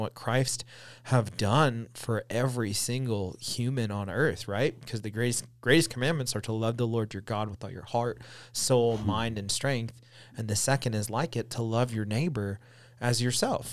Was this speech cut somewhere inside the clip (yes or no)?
no